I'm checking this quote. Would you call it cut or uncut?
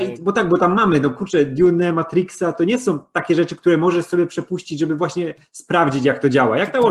uncut